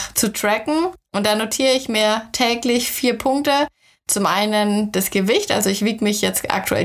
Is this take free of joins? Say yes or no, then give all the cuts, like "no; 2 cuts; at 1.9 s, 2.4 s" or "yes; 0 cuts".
yes; 0 cuts